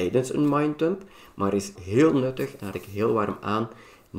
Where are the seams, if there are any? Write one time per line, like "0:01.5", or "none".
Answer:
0:01.8
0:02.7